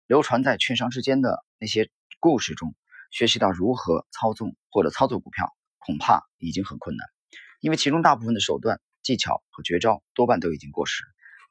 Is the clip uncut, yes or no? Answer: no